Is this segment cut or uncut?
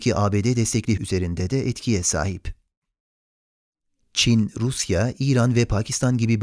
cut